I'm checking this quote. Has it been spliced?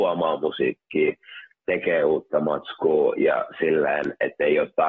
no; 0 cuts

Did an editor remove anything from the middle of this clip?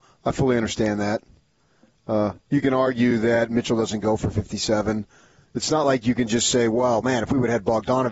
no; 0 cuts

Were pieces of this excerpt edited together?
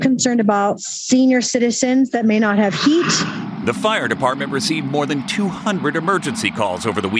no; 0 cuts

